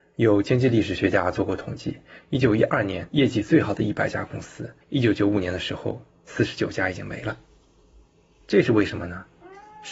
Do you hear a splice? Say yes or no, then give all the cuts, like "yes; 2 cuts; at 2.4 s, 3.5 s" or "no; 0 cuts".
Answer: yes; 1 cut; at 4.8 s